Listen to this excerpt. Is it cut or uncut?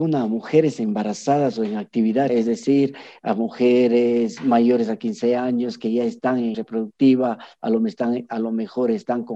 cut